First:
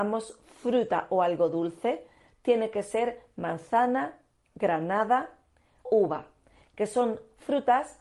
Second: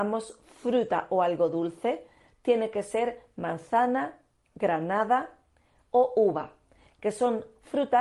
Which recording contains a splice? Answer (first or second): first